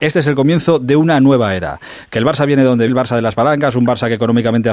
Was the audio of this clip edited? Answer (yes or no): yes